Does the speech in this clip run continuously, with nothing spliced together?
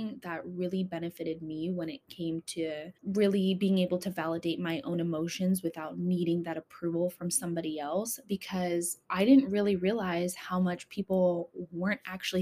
no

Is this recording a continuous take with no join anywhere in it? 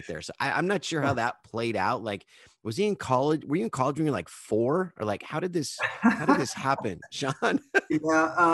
yes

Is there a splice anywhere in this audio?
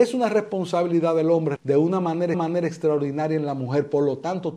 yes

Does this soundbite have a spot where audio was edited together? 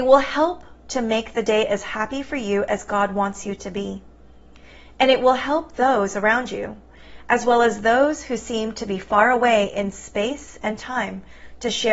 no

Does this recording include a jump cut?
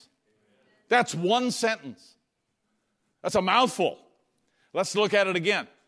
no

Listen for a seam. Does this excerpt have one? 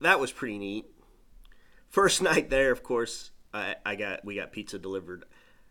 no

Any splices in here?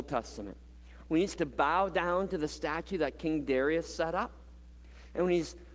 yes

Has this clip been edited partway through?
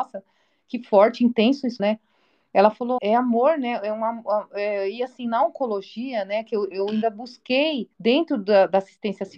yes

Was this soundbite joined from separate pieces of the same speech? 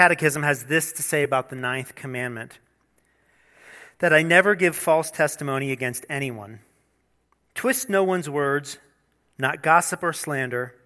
no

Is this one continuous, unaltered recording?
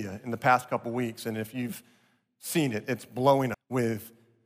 no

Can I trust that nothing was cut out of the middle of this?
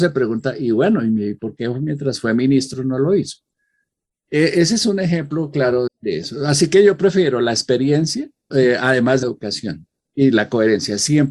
no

